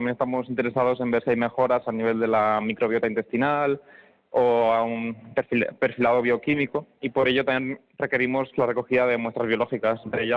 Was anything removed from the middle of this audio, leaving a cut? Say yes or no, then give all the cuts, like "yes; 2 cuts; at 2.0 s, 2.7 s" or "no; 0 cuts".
no; 0 cuts